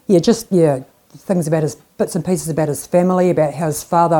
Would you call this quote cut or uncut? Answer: uncut